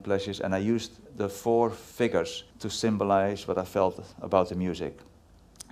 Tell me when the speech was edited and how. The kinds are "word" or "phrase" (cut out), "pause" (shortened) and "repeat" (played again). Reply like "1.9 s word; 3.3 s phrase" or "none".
1.1 s pause; 2.5 s pause